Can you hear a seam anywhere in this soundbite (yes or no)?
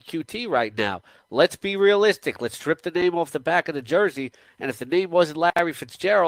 no